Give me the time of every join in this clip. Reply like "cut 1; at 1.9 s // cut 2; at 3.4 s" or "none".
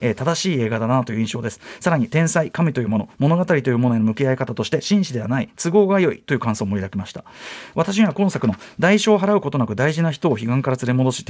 none